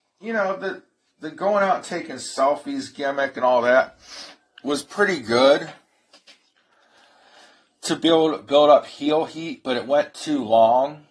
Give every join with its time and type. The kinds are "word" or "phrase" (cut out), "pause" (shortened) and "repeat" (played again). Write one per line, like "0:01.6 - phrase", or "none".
none